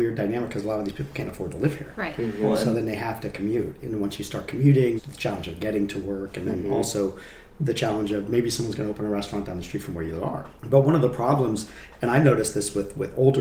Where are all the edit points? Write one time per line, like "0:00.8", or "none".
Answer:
0:05.0